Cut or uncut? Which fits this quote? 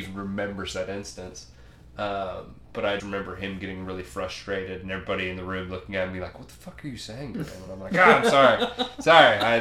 cut